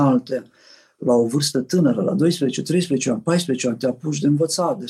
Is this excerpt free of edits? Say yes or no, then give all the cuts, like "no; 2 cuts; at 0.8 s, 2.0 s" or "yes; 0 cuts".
yes; 0 cuts